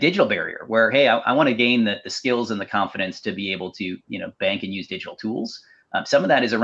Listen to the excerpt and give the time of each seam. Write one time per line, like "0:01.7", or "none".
none